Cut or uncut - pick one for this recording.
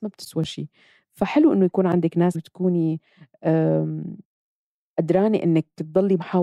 cut